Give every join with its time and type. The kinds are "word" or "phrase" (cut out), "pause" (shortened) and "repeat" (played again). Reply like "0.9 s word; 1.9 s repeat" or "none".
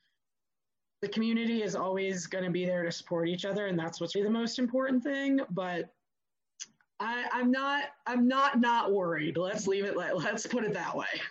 4.1 s word

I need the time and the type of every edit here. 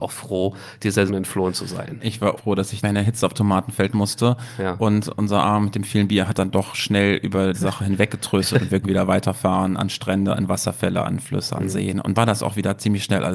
1.1 s word; 2.4 s word; 2.8 s word; 3.3 s word; 6.3 s word; 7.5 s word; 8.8 s word; 12.1 s word

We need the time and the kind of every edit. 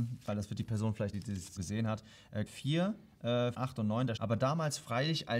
1.1 s word; 1.6 s word; 2.5 s word; 3.5 s word; 4.2 s word

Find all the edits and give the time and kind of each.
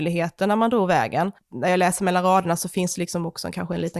none

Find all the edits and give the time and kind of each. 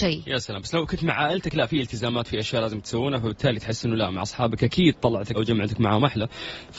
5.3 s word

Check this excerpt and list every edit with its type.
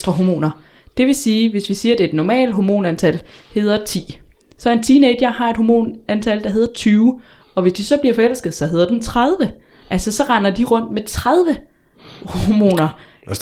none

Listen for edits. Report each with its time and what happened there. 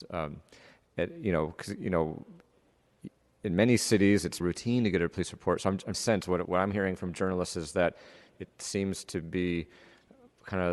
4.4 s word; 5.9 s phrase; 6.4 s word

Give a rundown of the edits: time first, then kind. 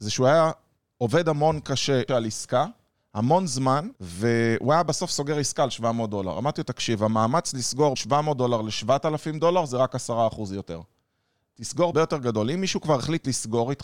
2.1 s phrase; 3.9 s pause; 7.9 s word; 11.9 s phrase

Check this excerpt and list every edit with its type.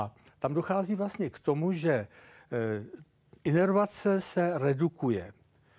none

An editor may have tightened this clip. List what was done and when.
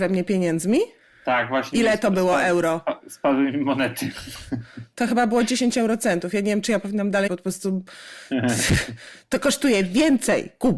7.3 s word

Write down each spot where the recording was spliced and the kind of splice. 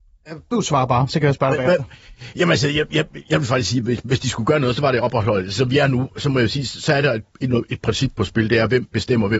none

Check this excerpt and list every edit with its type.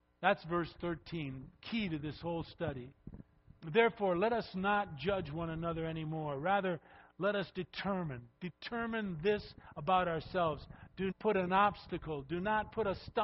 3.6 s pause; 11.1 s word

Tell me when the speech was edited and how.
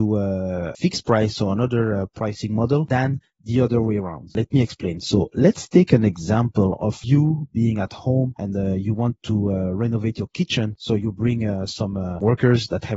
none

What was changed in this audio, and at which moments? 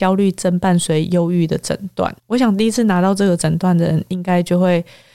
2.2 s pause

